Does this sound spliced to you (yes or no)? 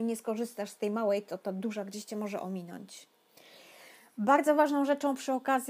no